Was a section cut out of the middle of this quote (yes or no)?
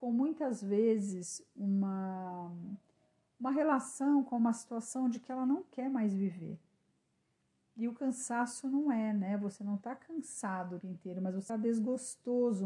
yes